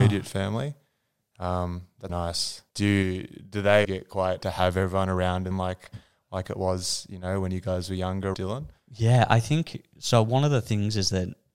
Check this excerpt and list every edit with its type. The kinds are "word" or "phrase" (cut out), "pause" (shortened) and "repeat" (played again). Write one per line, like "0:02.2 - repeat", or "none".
0:02.1 - word
0:02.7 - pause
0:03.8 - word
0:04.4 - word
0:05.5 - phrase
0:08.3 - phrase